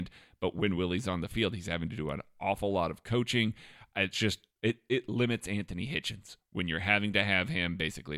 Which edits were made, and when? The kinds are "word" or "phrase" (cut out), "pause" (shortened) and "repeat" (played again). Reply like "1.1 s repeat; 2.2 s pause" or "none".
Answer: 4.1 s word